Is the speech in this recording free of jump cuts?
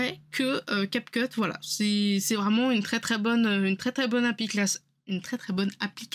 yes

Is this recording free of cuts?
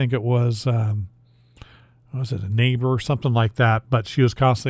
yes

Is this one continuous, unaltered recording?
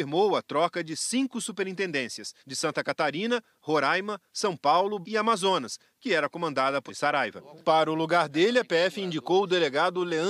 no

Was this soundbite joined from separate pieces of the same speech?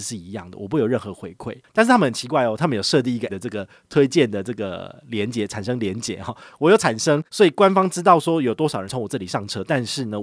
yes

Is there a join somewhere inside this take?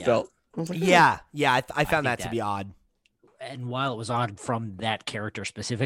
no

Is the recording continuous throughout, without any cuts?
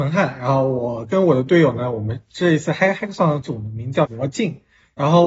no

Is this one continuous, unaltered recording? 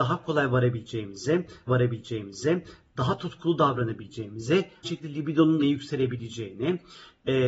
no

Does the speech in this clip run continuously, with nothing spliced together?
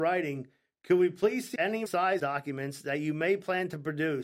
no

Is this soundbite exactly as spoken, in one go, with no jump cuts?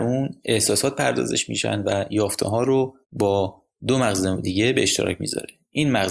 no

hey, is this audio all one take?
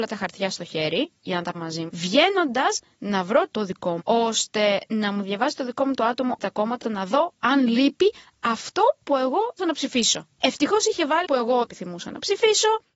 no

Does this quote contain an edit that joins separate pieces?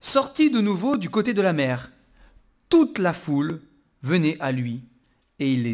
no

